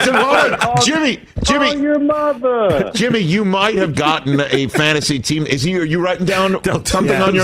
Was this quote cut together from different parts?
yes; 1 cut; at 3.9 s

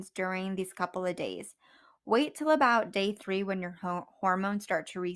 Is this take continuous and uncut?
yes; 0 cuts

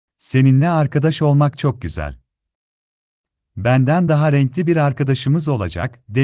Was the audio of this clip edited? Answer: no; 0 cuts

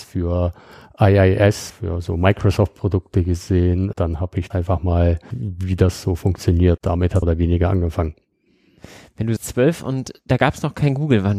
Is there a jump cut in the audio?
yes; 7 cuts; at 1.7 s, 3.9 s, 4.5 s, 5.3 s, 6.8 s, 7.2 s, 9.4 s

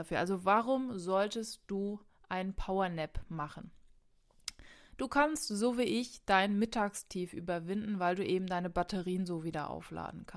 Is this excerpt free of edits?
yes; 0 cuts

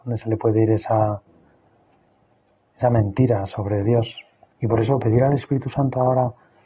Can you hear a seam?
no; 0 cuts

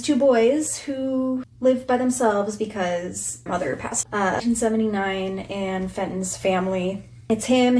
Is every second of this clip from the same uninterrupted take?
no; 2 cuts; at 3.5 s, 4.0 s

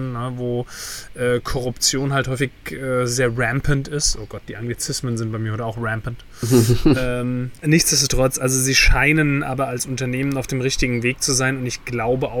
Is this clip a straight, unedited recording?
yes; 0 cuts

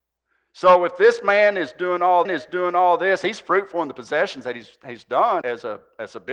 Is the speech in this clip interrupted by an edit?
yes; 2 cuts; at 2.2 s, 5.4 s

